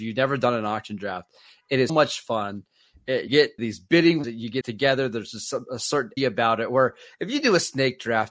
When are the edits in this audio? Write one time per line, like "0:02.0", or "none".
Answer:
0:01.9
0:03.3
0:03.6
0:04.2
0:04.6
0:06.2